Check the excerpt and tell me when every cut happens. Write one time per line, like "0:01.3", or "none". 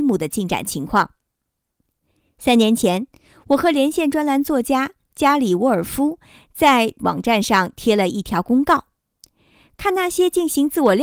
0:07.0